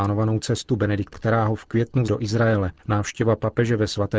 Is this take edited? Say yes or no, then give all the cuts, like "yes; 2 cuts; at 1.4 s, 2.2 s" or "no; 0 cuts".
yes; 3 cuts; at 1.1 s, 2.1 s, 2.8 s